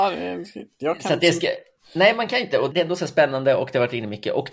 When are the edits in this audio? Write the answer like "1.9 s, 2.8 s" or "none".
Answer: 2.7 s